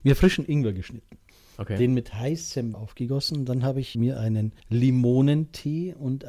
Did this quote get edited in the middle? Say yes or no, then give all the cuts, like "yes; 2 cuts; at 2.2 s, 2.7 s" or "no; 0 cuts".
yes; 4 cuts; at 1.3 s, 2.7 s, 3.9 s, 4.6 s